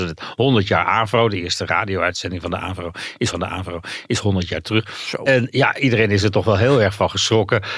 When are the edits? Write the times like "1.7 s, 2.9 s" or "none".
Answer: 3.3 s